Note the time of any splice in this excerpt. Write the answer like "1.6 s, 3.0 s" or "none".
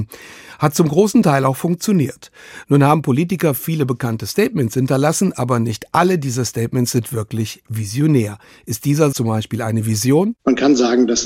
9.1 s